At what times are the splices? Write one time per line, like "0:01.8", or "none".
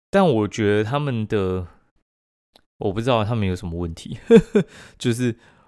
none